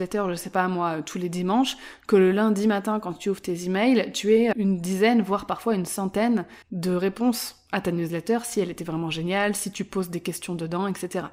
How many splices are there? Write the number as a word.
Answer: two